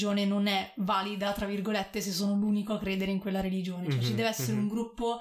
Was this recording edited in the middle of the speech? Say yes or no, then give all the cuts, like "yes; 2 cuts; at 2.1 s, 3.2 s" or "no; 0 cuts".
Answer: no; 0 cuts